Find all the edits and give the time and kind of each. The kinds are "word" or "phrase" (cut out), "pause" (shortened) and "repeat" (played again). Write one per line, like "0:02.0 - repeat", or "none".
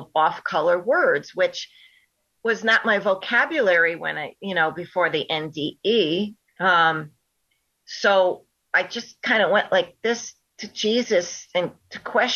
none

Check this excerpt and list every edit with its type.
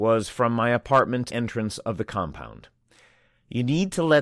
0:01.3 - word

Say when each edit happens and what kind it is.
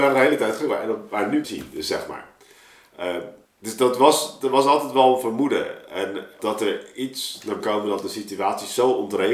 0:01.4 - phrase
0:03.5 - pause
0:06.4 - word
0:07.6 - phrase

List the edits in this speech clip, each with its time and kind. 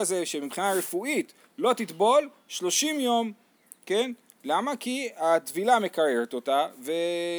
none

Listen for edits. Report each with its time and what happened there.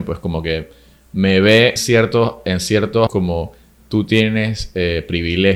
0:01.8 - word
0:03.1 - word

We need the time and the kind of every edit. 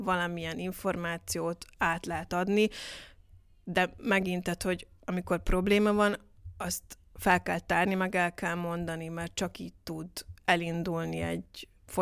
none

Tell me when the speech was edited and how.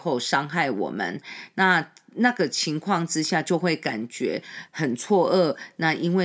0:04.7 - pause

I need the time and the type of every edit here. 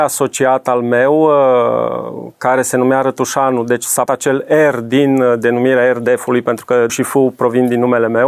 0:04.1 - word
0:06.9 - word

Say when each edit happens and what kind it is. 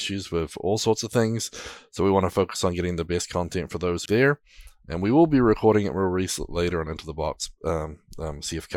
0:04.1 - phrase

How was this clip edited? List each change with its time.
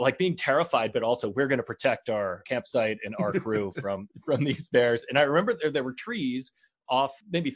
none

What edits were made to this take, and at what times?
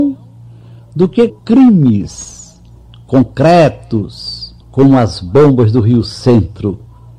0:01.3 - word
0:04.6 - pause

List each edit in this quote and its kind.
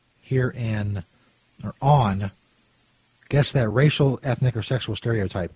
none

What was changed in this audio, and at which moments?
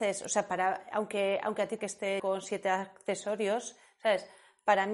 0:01.8 - phrase
0:02.2 - word

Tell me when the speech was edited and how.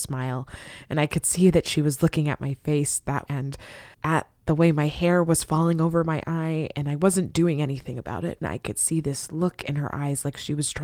0:03.3 - word
0:03.9 - pause
0:08.4 - phrase

